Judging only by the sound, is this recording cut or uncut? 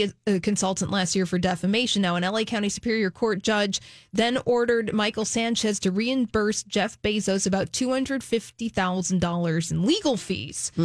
uncut